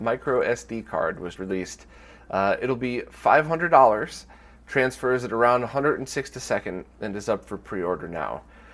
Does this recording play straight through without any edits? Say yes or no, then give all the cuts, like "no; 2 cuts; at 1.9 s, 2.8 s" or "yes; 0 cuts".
no; 2 cuts; at 1.4 s, 6.3 s